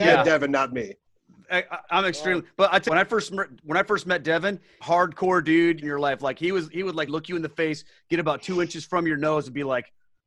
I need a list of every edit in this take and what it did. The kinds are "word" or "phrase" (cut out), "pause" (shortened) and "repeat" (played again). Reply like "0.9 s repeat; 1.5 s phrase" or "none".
2.9 s phrase; 4.8 s phrase; 5.8 s phrase; 7.1 s word